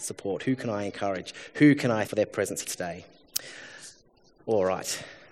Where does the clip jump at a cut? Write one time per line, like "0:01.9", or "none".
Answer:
0:02.1
0:02.6